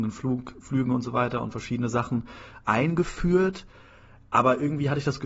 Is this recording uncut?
yes; 0 cuts

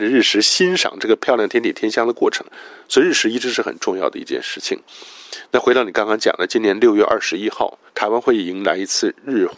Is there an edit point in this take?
yes; 1 cut; at 7.9 s

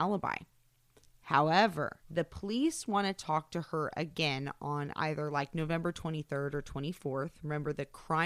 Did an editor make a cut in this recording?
yes; 1 cut; at 2.0 s

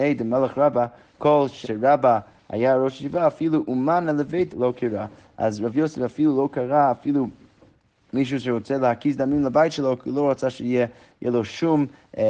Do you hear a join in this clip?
yes; 2 cuts; at 1.6 s, 4.5 s

